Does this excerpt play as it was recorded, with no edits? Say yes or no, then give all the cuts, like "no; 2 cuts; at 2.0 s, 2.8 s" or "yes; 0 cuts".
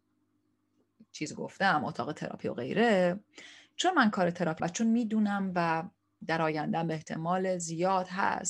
no; 1 cut; at 4.6 s